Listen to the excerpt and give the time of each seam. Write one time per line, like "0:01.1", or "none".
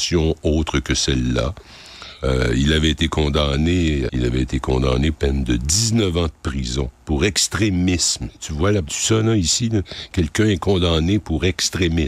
0:04.1
0:05.1
0:08.9

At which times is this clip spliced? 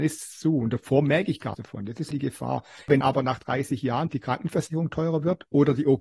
0:01.5
0:02.1
0:03.0
0:04.1

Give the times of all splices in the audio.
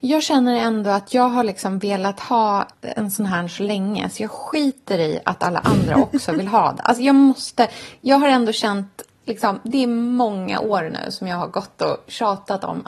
0:02.7

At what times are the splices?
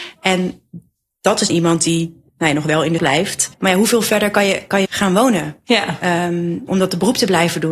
0:01.5
0:02.3
0:03.0
0:03.5
0:04.8
0:06.7

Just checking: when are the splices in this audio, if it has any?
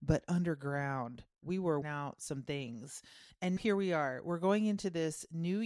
0:01.8
0:03.6

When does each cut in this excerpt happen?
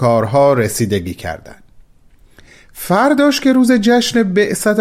none

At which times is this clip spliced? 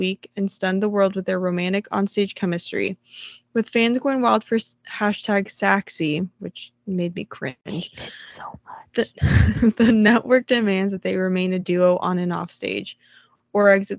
none

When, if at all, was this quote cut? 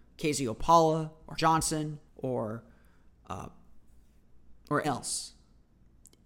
0:01.4
0:02.1
0:04.8

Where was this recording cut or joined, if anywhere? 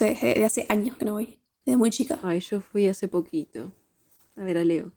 none

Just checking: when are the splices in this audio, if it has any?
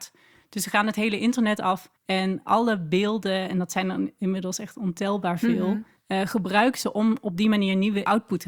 0:02.0
0:06.0

